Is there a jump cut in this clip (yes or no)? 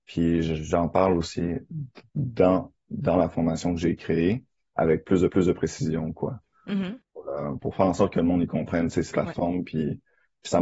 yes